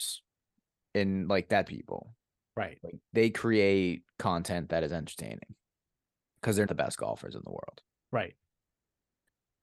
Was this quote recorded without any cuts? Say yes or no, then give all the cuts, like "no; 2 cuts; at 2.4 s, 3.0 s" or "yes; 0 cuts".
no; 2 cuts; at 1.7 s, 6.7 s